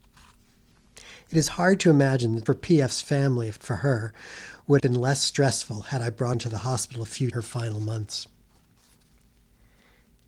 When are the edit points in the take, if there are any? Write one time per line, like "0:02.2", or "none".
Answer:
0:02.5
0:03.6
0:04.8
0:06.3
0:07.3